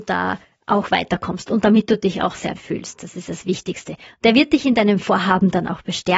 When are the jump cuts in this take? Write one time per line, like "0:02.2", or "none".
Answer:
0:02.6